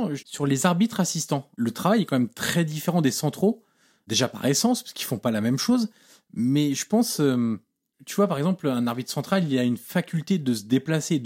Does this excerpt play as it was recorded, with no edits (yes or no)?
yes